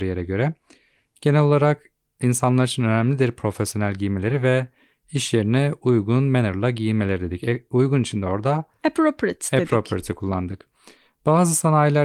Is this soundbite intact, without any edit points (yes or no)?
yes